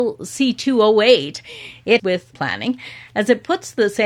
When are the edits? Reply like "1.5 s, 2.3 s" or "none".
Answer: 2.0 s, 2.3 s